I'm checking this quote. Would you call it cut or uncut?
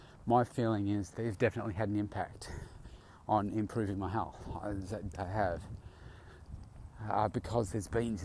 cut